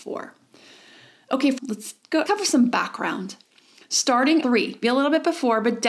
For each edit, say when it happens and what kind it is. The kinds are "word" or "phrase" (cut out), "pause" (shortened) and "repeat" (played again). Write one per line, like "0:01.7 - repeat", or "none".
0:01.6 - word
0:02.3 - word
0:04.4 - word
0:04.8 - word

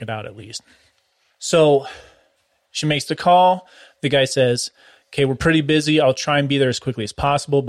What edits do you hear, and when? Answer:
none

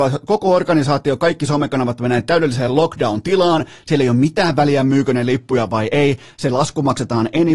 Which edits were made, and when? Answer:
none

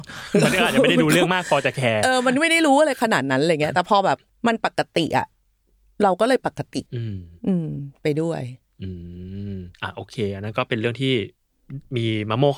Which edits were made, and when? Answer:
0:04.3 - pause
0:06.9 - pause
0:09.7 - pause

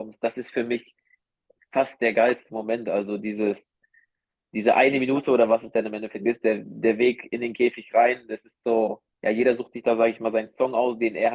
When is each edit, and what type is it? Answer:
0:09.1 - pause

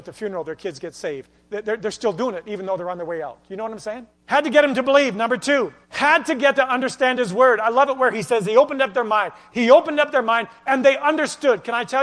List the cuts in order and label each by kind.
0:04.1 - pause
0:05.8 - pause
0:06.6 - word

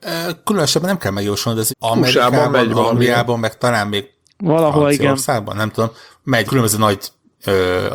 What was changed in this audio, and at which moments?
0:01.7 - word
0:06.5 - word

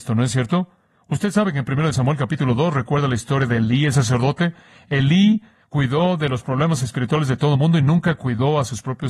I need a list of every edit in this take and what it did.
none

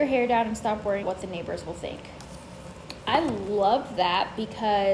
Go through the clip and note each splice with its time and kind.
0:01.0 - word

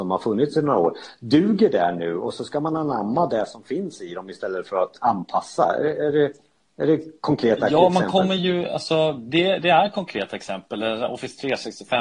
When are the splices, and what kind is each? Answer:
none

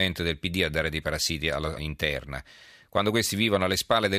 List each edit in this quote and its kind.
0:01.8 - word

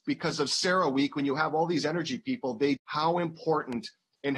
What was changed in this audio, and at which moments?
0:02.8 - phrase

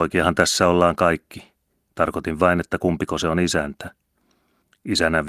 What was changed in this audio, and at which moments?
none

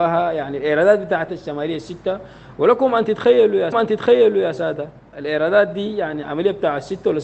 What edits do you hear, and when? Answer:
0:01.3 - word
0:03.7 - repeat

